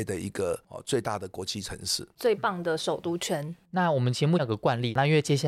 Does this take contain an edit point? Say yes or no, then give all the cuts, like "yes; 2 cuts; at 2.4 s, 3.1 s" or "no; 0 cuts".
no; 0 cuts